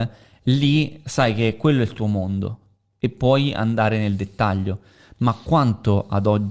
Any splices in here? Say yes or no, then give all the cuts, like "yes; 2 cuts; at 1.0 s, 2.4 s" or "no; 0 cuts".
no; 0 cuts